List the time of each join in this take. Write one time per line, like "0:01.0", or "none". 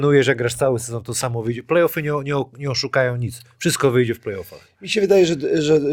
none